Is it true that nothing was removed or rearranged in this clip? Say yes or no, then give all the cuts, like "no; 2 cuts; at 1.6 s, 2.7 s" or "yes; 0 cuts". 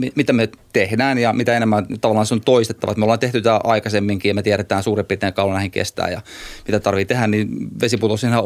yes; 0 cuts